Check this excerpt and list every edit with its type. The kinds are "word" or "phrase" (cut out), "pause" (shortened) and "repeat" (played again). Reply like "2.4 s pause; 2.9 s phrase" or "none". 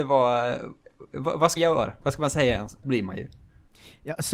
1.6 s word; 2.8 s phrase

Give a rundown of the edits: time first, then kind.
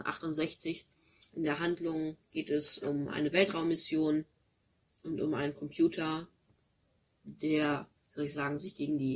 8.0 s pause

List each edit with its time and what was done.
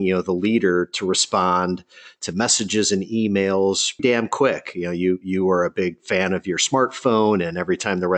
4.0 s word

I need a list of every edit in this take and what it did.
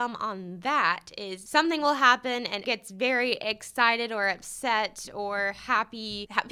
1.5 s word; 2.6 s word

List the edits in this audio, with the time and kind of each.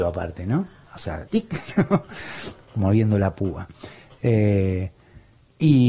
1.3 s word

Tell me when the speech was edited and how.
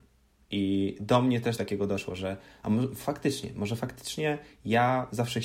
1.6 s word

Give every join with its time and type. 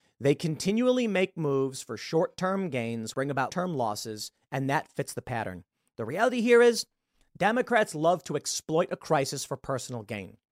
3.1 s word; 3.5 s word

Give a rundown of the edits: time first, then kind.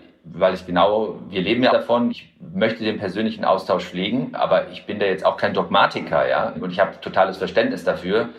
1.7 s word; 2.1 s word; 6.5 s word

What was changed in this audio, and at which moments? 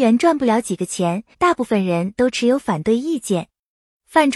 1.3 s pause

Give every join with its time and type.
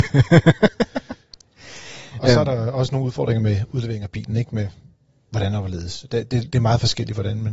none

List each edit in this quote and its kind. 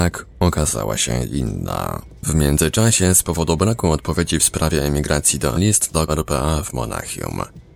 2.2 s pause; 5.5 s phrase; 6.1 s word

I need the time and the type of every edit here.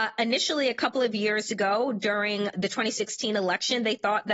2.5 s word

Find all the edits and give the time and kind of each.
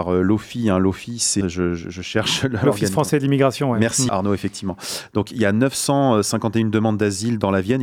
1.4 s word; 4.1 s word

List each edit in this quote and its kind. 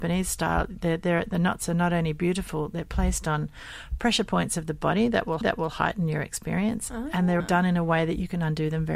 5.4 s repeat; 7.4 s word

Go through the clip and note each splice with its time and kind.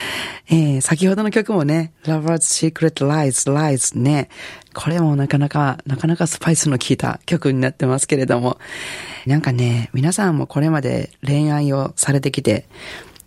2.0 s pause; 3.5 s repeat; 9.3 s phrase

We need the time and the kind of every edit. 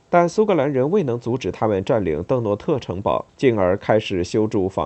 3.3 s pause

